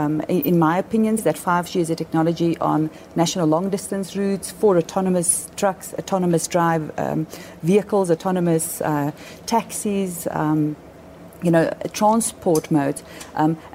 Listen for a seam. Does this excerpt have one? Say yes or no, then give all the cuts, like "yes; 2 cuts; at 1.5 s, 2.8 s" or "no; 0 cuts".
yes; 1 cut; at 1.2 s